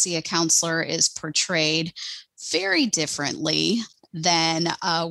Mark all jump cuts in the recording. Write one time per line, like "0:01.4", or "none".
none